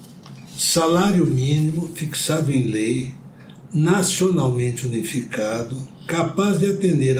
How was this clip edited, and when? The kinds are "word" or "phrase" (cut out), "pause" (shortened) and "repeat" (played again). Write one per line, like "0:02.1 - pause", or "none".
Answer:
none